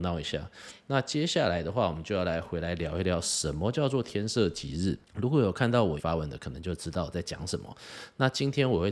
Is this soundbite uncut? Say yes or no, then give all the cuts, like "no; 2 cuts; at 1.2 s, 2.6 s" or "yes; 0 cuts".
no; 2 cuts; at 5.0 s, 6.0 s